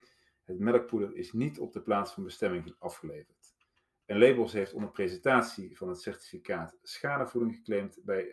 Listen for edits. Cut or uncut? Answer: uncut